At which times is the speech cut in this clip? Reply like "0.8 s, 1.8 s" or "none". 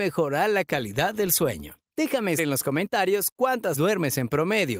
2.4 s, 3.7 s